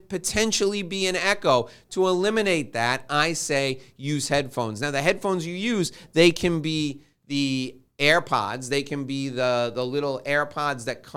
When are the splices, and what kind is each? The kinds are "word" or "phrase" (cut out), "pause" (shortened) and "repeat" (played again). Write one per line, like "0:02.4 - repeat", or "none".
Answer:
none